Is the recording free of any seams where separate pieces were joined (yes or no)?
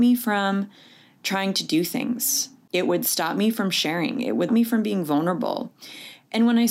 no